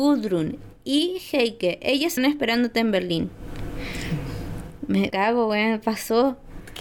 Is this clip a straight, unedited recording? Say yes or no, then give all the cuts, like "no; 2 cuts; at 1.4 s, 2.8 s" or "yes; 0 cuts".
no; 2 cuts; at 2.2 s, 5.1 s